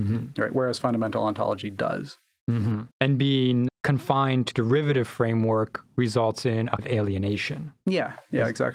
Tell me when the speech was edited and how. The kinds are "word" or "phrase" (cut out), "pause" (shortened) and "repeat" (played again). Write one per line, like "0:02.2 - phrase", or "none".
0:02.9 - pause
0:03.7 - word
0:04.5 - word
0:06.8 - word